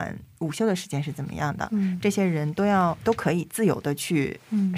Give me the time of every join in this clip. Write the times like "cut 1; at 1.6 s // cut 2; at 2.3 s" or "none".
none